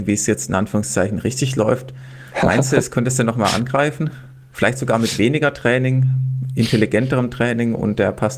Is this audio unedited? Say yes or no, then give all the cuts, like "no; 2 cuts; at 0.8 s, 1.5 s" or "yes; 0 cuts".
yes; 0 cuts